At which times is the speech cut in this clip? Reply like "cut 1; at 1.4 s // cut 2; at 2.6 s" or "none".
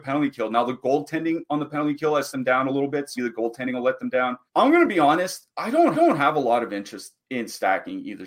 cut 1; at 2.3 s // cut 2; at 3.2 s // cut 3; at 4.5 s // cut 4; at 5.5 s // cut 5; at 5.9 s // cut 6; at 7.2 s